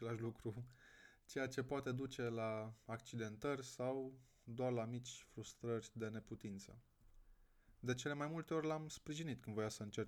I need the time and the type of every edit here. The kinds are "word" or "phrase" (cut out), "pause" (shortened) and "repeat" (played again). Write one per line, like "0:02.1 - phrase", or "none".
none